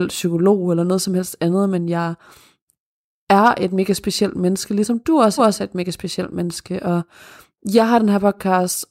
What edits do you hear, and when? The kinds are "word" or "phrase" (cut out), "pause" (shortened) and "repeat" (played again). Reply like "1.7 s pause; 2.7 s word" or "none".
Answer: 5.4 s repeat